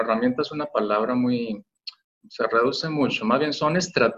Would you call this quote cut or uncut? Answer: uncut